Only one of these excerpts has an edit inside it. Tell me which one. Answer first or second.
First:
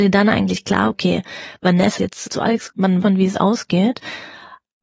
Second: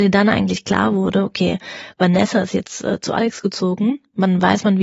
first